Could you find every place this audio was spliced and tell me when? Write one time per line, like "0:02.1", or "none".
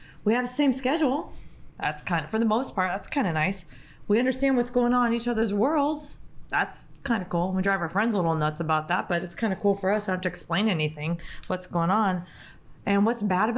none